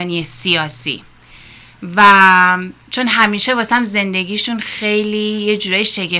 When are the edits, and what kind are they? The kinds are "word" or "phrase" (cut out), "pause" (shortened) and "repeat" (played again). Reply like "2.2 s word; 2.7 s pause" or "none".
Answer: none